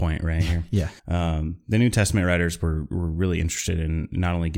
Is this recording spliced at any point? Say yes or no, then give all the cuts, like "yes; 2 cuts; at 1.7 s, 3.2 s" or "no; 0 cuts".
yes; 1 cut; at 1.0 s